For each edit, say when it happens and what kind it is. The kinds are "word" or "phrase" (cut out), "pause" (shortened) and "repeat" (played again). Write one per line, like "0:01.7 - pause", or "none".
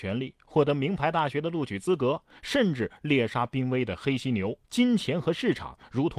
0:04.6 - pause